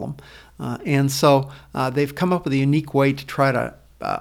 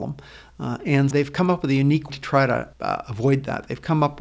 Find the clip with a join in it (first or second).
second